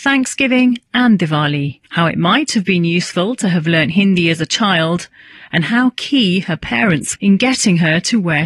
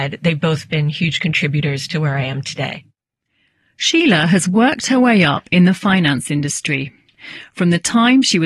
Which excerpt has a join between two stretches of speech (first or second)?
first